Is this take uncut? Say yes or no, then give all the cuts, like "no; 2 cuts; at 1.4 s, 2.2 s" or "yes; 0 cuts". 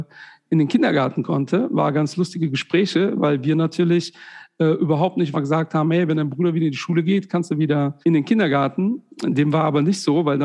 no; 2 cuts; at 5.3 s, 8.0 s